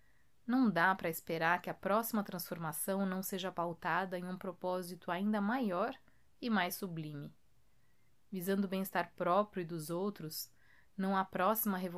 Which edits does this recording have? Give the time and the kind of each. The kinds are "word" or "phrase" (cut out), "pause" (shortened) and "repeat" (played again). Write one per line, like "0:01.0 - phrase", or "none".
none